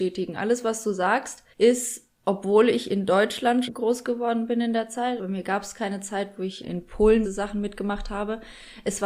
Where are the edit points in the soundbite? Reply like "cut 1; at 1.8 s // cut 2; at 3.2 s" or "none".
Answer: cut 1; at 1.5 s // cut 2; at 3.7 s // cut 3; at 5.2 s // cut 4; at 6.6 s // cut 5; at 7.2 s